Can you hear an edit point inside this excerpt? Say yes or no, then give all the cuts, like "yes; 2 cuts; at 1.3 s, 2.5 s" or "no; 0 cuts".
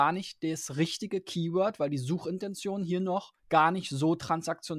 yes; 1 cut; at 3.4 s